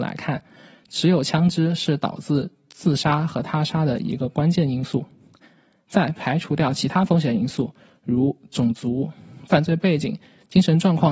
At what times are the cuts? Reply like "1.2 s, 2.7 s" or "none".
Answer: none